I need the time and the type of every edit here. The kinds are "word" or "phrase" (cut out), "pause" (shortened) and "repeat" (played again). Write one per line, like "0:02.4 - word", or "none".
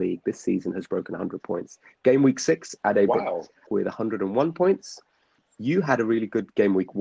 none